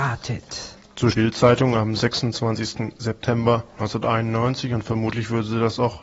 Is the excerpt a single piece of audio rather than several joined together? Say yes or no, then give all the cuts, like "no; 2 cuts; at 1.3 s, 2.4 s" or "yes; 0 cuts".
no; 1 cut; at 1.1 s